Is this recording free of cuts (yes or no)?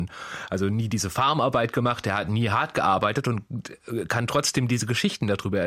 yes